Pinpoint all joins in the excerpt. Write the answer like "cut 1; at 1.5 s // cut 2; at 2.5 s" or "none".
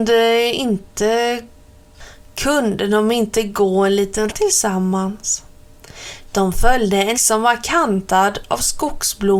cut 1; at 4.3 s // cut 2; at 7.1 s